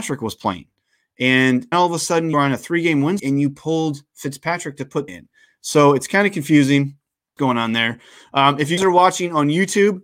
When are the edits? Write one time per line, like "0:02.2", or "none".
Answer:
0:01.7
0:02.3
0:03.2
0:05.1
0:07.4
0:08.8